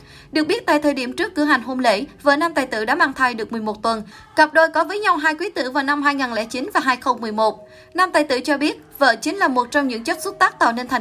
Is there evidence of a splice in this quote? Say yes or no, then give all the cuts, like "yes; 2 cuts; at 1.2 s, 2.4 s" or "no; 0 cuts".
no; 0 cuts